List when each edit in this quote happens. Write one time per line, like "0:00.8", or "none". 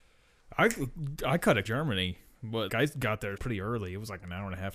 0:01.6
0:02.7
0:03.4